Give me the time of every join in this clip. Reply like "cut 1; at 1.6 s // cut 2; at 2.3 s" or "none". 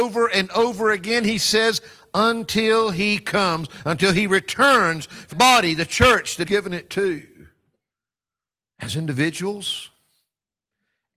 cut 1; at 5.3 s // cut 2; at 6.5 s